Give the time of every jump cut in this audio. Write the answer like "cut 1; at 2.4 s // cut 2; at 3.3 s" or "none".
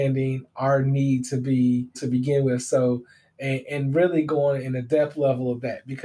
cut 1; at 1.9 s